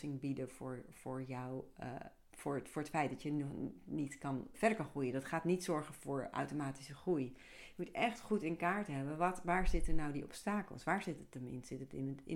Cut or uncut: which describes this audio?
cut